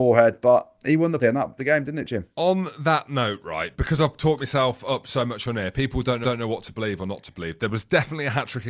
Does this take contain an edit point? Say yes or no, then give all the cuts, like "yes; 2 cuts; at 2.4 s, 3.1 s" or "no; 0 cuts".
yes; 5 cuts; at 1.2 s, 1.6 s, 2.3 s, 3.7 s, 6.2 s